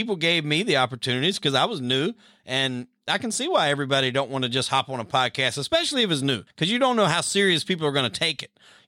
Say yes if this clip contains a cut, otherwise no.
yes